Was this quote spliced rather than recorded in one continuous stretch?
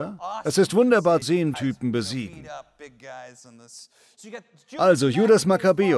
yes; 2 cuts; at 1.2 s, 1.5 s

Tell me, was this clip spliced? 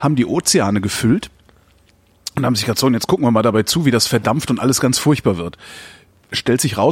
no; 0 cuts

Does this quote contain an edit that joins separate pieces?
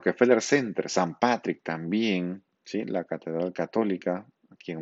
yes; 1 cut; at 2.5 s

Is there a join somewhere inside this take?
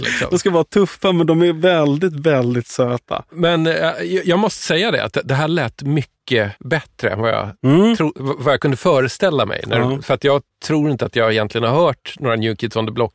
yes; 1 cut; at 6.6 s

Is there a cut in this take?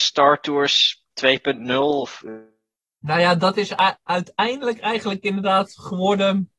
no; 0 cuts

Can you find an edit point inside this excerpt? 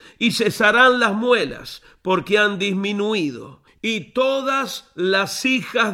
no; 0 cuts

